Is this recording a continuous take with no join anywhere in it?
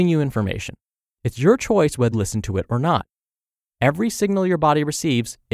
no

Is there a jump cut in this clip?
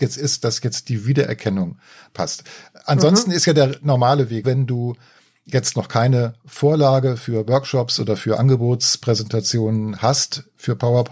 yes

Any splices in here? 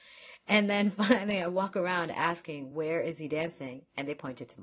no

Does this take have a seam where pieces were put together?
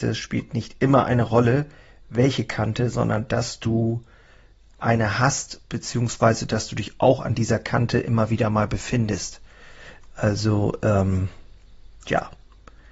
no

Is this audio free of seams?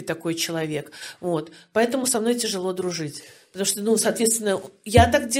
yes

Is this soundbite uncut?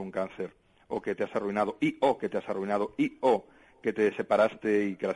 yes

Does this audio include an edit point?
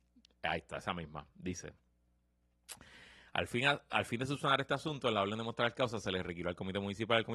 no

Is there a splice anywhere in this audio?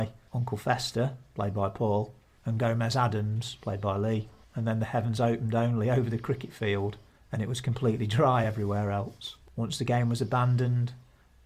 no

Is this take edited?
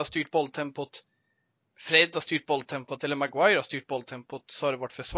no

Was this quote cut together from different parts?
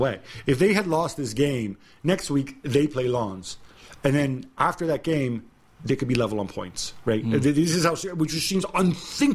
no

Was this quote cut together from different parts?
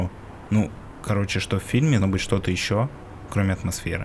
yes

